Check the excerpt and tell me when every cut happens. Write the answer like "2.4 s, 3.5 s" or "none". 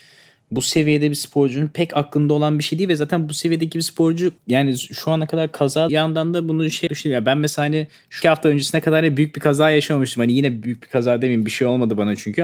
4.4 s, 5.9 s, 6.9 s, 8.2 s